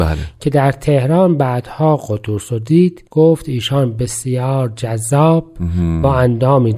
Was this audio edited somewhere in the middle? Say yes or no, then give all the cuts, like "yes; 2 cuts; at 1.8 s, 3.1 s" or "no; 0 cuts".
no; 0 cuts